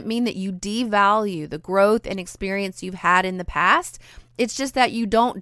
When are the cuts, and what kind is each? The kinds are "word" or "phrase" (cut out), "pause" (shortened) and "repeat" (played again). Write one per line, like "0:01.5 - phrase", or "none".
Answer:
none